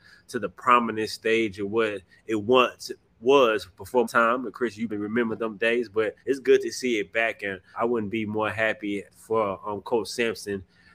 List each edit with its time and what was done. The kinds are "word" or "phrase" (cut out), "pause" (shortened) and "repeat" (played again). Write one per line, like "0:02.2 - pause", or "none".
0:04.0 - word
0:04.9 - word
0:06.2 - pause
0:07.7 - word
0:09.1 - pause